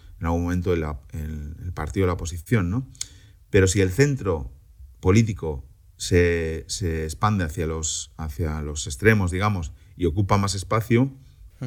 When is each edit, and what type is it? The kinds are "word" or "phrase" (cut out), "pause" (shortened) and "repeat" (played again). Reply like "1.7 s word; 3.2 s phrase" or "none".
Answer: none